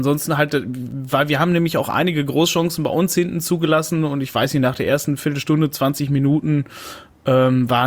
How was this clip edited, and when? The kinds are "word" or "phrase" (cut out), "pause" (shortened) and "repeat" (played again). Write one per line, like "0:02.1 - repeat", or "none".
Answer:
none